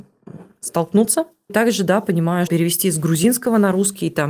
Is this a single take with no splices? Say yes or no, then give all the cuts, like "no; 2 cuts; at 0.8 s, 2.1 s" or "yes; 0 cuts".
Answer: no; 2 cuts; at 1.5 s, 2.5 s